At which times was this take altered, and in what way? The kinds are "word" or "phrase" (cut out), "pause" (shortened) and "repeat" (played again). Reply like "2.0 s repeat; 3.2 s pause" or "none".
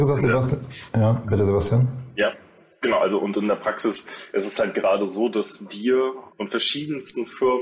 6.3 s word